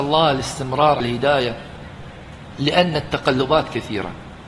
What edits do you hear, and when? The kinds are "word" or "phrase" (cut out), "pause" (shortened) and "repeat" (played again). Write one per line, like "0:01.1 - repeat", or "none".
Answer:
0:01.0 - word

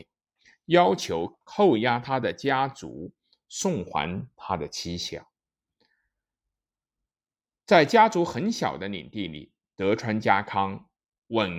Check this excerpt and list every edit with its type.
none

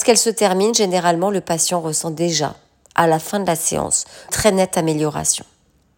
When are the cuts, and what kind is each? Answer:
0:04.3 - word

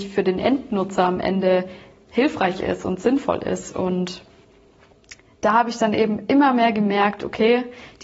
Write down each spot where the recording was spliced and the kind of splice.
none

